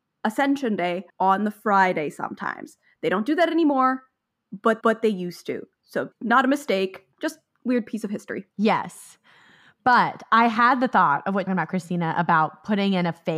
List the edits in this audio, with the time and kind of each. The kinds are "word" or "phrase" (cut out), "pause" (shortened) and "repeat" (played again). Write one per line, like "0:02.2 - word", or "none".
0:01.1 - pause
0:04.8 - repeat
0:06.1 - word
0:07.1 - pause
0:08.5 - pause
0:11.5 - phrase